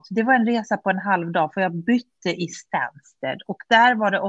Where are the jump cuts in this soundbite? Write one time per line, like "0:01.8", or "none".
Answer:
none